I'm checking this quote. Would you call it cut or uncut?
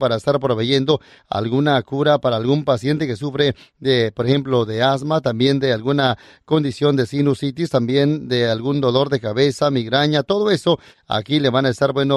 uncut